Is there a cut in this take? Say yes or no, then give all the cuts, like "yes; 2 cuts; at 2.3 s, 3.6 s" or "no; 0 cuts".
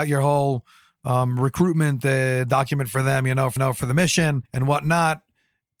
yes; 2 cuts; at 3.6 s, 4.5 s